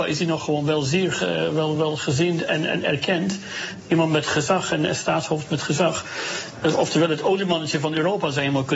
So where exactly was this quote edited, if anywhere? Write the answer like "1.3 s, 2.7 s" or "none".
none